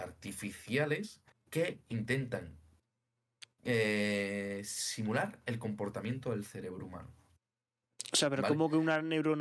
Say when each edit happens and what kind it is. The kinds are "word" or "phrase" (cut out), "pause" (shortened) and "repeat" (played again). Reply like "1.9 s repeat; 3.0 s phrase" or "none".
1.3 s pause; 3.5 s pause